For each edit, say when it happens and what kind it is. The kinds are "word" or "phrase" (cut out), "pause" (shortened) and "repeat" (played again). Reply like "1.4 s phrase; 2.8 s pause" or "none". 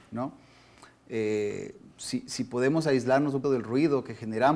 3.4 s word